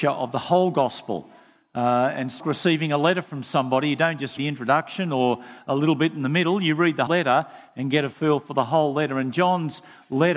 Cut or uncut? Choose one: cut